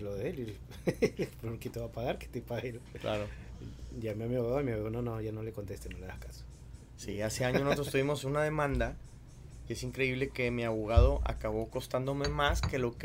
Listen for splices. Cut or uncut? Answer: uncut